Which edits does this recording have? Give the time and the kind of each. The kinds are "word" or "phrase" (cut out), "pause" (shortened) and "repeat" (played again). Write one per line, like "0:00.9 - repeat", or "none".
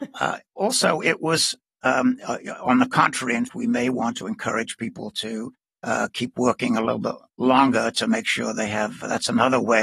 0:03.5 - word